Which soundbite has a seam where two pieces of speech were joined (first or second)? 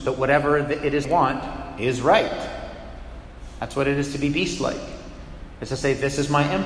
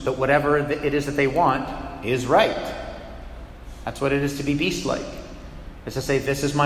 first